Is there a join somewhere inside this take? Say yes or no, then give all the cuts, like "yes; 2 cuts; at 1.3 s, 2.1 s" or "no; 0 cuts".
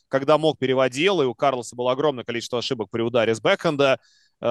no; 0 cuts